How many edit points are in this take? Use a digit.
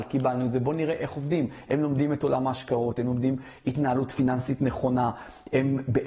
0